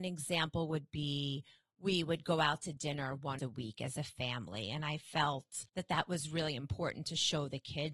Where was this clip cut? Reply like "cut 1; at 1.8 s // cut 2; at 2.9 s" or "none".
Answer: cut 1; at 3.4 s // cut 2; at 5.7 s